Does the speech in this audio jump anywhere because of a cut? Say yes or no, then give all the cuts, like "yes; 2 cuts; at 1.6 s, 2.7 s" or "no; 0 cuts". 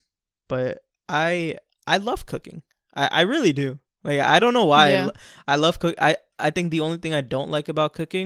no; 0 cuts